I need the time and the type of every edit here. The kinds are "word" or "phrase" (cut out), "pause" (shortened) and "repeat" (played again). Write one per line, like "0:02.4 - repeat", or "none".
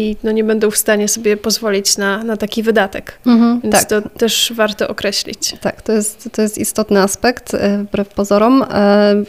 none